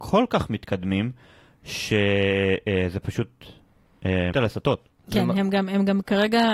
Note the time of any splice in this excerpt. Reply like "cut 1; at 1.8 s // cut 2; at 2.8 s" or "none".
cut 1; at 4.3 s